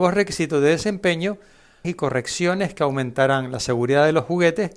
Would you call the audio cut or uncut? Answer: cut